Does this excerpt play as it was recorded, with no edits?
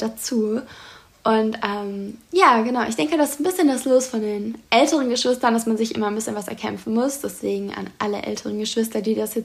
yes; 0 cuts

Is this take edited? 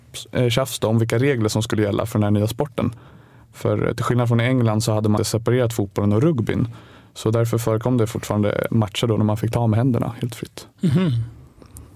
yes; 1 cut; at 5.2 s

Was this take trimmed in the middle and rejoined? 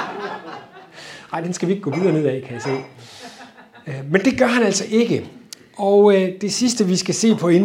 no; 0 cuts

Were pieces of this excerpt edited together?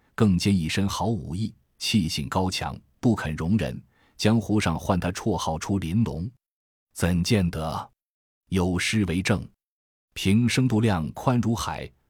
no; 0 cuts

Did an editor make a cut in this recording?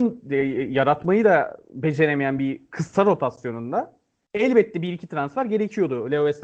no; 0 cuts

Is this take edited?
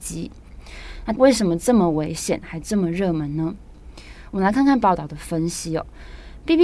yes; 1 cut; at 4.8 s

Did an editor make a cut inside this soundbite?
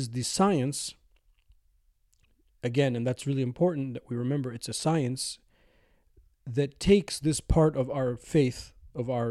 no; 0 cuts

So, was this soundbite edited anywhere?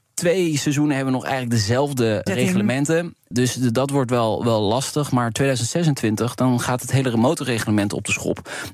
yes; 1 cut; at 2.3 s

